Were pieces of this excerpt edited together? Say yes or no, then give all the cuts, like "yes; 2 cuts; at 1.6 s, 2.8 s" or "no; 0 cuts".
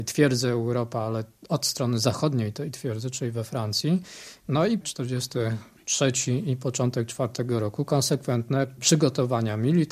no; 0 cuts